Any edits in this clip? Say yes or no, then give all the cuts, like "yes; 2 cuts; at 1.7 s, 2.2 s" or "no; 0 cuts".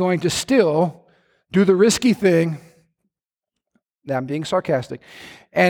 no; 0 cuts